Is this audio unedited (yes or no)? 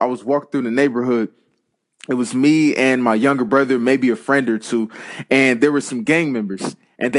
yes